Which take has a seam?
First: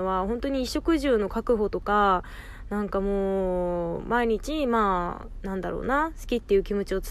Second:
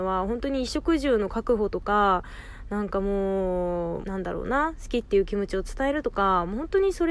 second; 1 cut; at 4.0 s

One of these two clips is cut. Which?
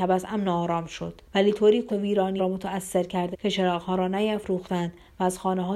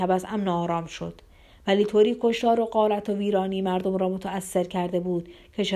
first; 4 cuts; at 1.3 s, 1.9 s, 2.4 s, 3.3 s

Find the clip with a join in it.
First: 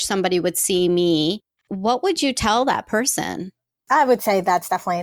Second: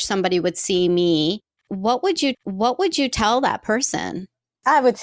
second; 1 cut; at 2.3 s

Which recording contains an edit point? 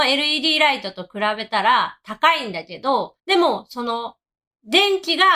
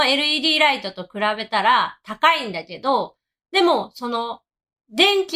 first; 1 cut; at 3.2 s

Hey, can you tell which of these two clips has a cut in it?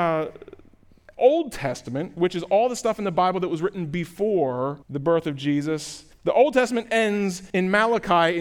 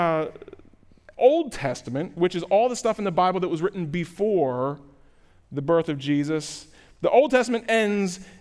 first; 3 cuts; at 4.8 s, 6.1 s, 7.5 s

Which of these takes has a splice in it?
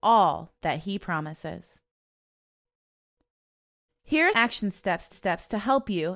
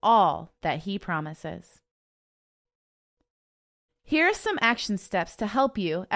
first; 2 cuts; at 4.3 s, 5.1 s

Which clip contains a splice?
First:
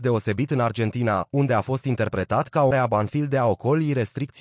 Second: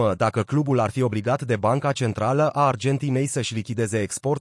first; 1 cut; at 2.7 s

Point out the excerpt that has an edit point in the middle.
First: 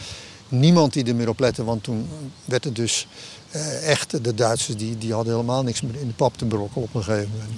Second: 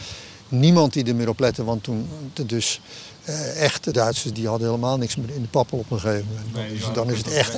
second; 4 cuts; at 2.3 s, 3.9 s, 4.3 s, 5.7 s

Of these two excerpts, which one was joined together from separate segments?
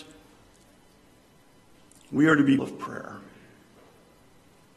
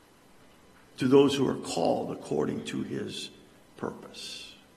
first; 1 cut; at 2.6 s

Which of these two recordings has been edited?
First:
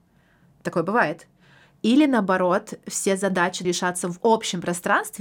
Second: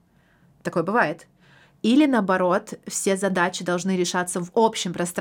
first; 1 cut; at 3.6 s

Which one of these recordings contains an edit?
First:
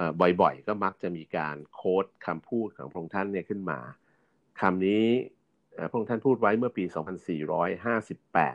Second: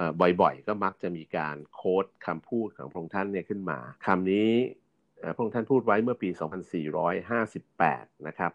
second; 1 cut; at 4.0 s

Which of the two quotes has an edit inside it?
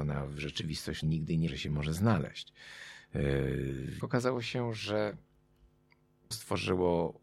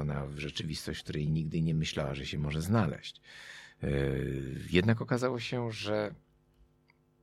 first; 4 cuts; at 1.0 s, 1.5 s, 4.0 s, 6.3 s

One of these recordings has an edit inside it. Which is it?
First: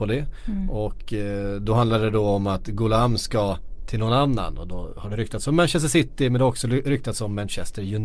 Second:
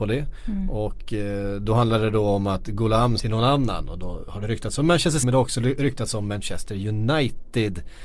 second; 2 cuts; at 3.2 s, 5.2 s

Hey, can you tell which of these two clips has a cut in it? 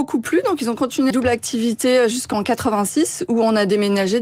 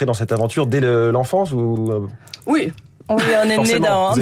first; 1 cut; at 1.1 s

